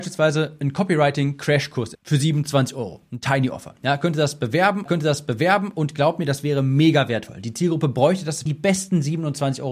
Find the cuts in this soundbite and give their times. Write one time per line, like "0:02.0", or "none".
0:01.9
0:04.9
0:08.5

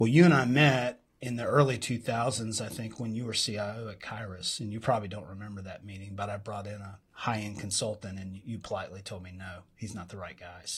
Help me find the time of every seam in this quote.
none

